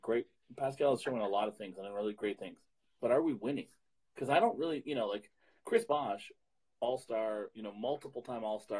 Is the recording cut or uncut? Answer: uncut